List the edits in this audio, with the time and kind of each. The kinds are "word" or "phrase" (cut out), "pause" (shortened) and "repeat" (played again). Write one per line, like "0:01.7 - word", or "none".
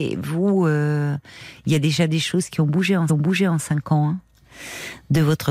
0:03.1 - repeat